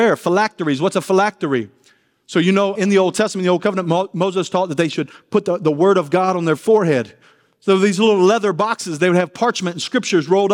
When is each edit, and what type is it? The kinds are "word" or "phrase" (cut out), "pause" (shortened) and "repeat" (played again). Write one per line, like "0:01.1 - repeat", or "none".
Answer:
0:02.8 - word